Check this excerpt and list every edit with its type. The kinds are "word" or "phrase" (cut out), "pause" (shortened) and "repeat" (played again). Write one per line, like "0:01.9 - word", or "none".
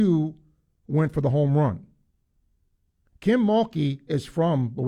none

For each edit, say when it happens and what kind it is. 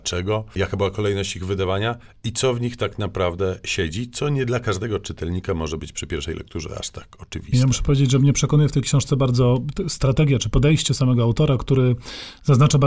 none

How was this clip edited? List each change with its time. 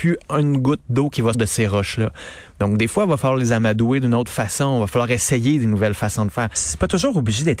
0:01.3 - word

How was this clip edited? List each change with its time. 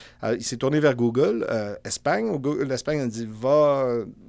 none

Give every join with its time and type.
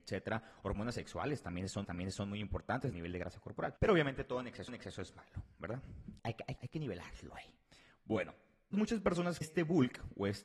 0:01.8 - repeat
0:02.9 - phrase
0:03.8 - pause
0:04.7 - repeat
0:06.2 - pause
0:06.6 - word
0:08.7 - word
0:09.4 - phrase

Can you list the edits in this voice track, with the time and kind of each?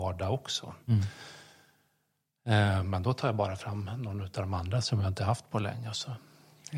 none

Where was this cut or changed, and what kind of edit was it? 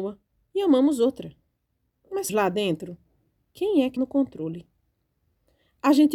0:02.3 - word
0:04.0 - word

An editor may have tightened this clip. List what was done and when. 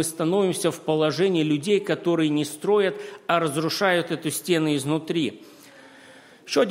none

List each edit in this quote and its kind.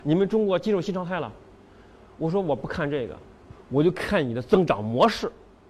none

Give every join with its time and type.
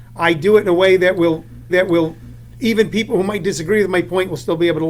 0:01.7 - repeat

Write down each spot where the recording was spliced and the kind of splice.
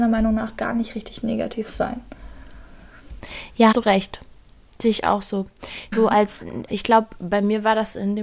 0:03.7 - word
0:05.9 - phrase
0:06.7 - word

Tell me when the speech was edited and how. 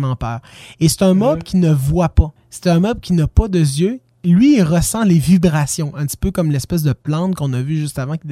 0:02.4 - pause

